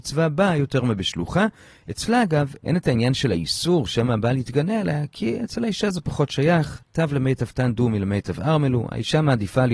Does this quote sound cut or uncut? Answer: uncut